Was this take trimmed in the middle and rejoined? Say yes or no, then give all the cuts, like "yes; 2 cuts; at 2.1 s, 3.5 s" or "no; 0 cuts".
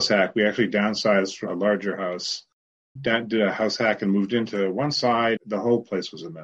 yes; 3 cuts; at 1.5 s, 3.0 s, 5.4 s